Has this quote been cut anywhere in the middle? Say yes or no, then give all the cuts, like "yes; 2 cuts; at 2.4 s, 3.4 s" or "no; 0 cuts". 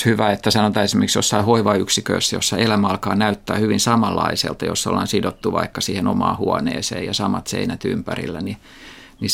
no; 0 cuts